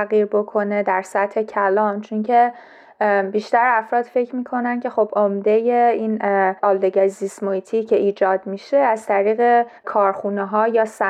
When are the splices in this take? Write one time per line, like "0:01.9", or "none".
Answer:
0:06.6
0:09.8